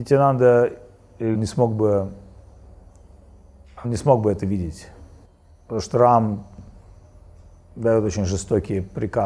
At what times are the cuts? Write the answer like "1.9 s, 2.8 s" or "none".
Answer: 1.3 s, 3.8 s, 5.2 s